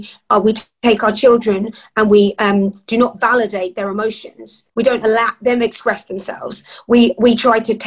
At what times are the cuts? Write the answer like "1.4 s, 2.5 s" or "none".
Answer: 4.7 s